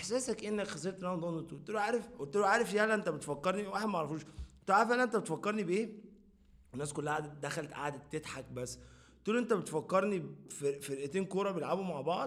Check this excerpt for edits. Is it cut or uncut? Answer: uncut